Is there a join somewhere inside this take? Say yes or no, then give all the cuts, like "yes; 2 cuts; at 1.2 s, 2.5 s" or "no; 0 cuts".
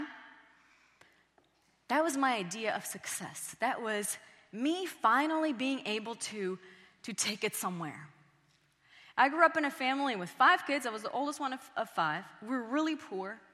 no; 0 cuts